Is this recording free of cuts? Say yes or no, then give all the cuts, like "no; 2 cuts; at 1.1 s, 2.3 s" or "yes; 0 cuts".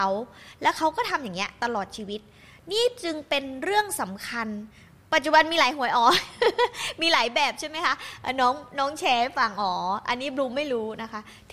yes; 0 cuts